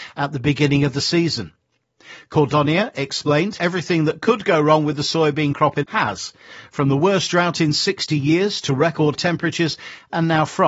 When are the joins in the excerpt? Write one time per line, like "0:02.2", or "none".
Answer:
0:03.6
0:05.8
0:09.1